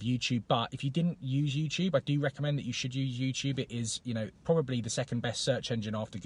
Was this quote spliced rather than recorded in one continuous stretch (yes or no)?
yes